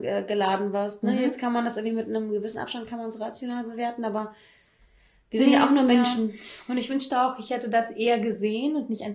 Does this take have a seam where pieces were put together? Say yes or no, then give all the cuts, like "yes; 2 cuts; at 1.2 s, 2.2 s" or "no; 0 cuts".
no; 0 cuts